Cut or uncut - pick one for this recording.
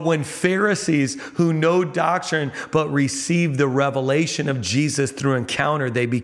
uncut